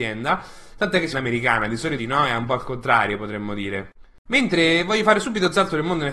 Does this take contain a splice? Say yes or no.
yes